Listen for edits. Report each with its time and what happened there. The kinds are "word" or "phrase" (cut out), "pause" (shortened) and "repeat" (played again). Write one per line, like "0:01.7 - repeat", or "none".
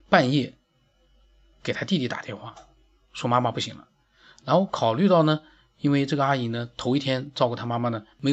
none